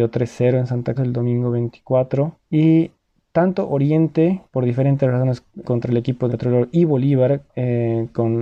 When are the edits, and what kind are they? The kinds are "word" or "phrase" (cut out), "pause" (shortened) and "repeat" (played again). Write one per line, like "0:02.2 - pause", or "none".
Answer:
0:01.0 - word
0:02.4 - pause
0:04.5 - pause
0:05.6 - word
0:06.3 - word
0:07.5 - pause